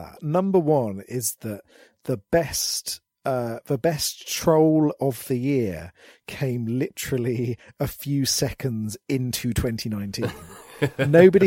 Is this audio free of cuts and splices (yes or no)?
yes